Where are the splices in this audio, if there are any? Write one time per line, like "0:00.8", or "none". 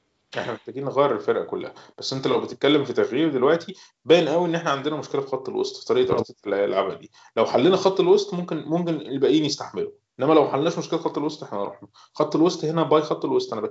none